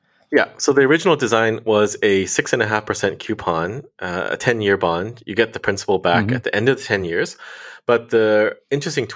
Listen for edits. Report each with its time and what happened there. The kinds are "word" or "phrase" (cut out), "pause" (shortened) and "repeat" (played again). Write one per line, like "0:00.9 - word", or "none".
none